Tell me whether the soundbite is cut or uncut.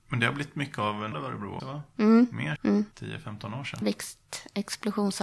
cut